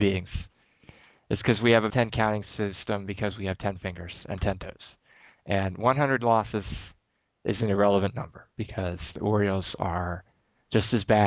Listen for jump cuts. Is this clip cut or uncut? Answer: cut